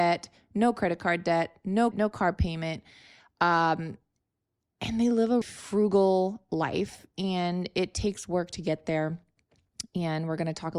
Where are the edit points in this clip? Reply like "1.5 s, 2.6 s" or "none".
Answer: 1.9 s, 5.4 s